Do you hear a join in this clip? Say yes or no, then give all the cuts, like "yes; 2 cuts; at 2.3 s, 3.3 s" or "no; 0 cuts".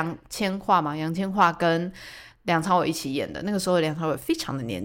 no; 0 cuts